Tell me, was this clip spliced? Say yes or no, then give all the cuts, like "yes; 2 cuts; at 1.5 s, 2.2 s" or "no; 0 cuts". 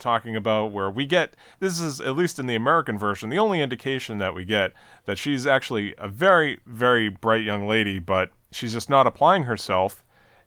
no; 0 cuts